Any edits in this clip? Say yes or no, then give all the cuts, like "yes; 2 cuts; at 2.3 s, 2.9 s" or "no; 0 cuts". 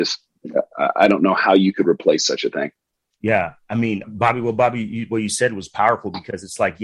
yes; 1 cut; at 4.0 s